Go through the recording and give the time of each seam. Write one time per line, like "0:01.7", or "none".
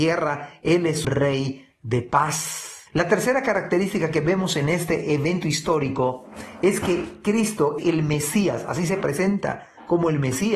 0:01.0
0:02.9
0:07.8